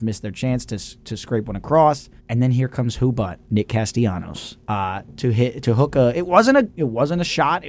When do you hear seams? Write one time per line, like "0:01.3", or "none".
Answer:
0:02.2
0:03.4
0:04.6